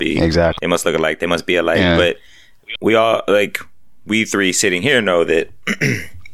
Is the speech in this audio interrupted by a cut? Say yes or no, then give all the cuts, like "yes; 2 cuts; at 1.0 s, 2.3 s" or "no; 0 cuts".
no; 0 cuts